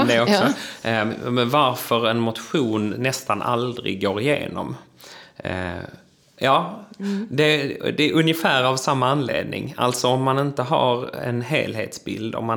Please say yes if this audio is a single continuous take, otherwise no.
yes